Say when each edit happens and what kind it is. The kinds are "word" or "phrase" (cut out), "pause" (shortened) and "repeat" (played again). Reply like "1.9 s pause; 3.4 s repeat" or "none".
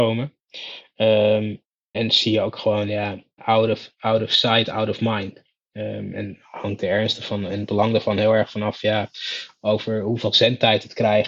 1.9 s word; 3.4 s word; 6.1 s word